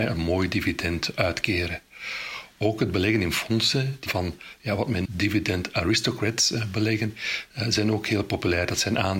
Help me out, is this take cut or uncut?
cut